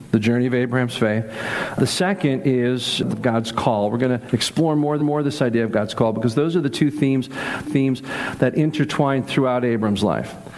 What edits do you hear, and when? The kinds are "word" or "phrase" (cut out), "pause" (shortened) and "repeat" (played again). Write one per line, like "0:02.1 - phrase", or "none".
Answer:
0:03.1 - word
0:05.0 - repeat
0:07.6 - repeat

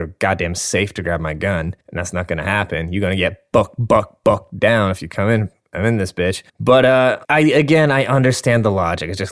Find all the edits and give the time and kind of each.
0:01.8 - pause
0:06.5 - pause
0:07.2 - pause

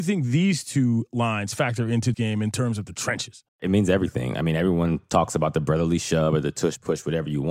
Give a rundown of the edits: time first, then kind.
0:02.1 - word
0:03.5 - pause

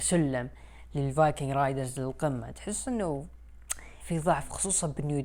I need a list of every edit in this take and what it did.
0:04.0 - phrase

